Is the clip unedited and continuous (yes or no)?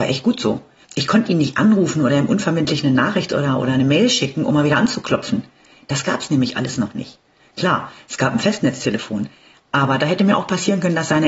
yes